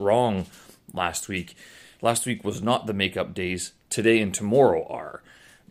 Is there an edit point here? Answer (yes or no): no